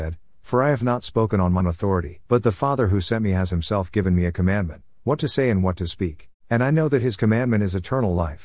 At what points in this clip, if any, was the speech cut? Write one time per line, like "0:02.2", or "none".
0:01.6
0:02.3
0:06.4